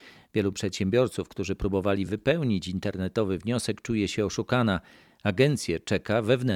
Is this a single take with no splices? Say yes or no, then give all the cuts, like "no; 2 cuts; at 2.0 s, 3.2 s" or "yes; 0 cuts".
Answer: yes; 0 cuts